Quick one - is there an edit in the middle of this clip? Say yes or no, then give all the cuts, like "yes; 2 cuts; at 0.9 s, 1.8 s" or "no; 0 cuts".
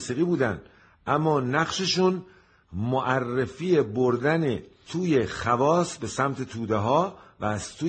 yes; 1 cut; at 4.8 s